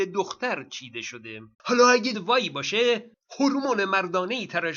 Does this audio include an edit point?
yes; 2 cuts; at 1.5 s, 2.1 s

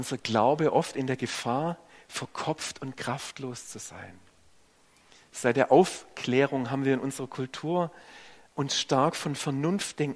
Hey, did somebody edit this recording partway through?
no; 0 cuts

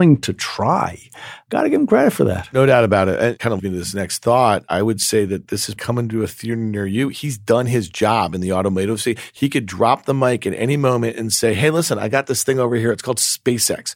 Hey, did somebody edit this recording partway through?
yes; 2 cuts; at 3.6 s, 5.8 s

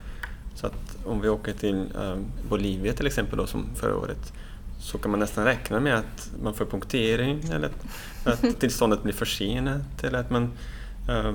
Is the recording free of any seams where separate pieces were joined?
no; 3 cuts; at 3.7 s, 6.4 s, 8.5 s

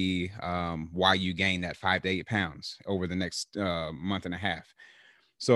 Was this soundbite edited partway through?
no; 0 cuts

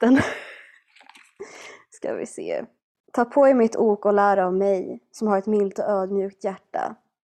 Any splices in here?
no; 0 cuts

